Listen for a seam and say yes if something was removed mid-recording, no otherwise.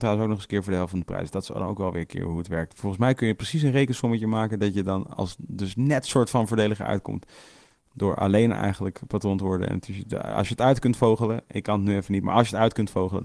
no